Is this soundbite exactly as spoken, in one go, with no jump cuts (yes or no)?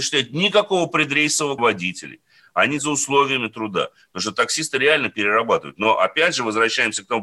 no